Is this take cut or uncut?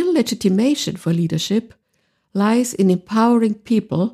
uncut